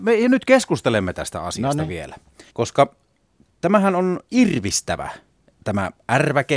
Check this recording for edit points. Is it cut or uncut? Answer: cut